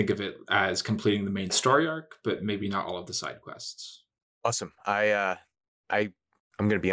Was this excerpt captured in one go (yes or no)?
yes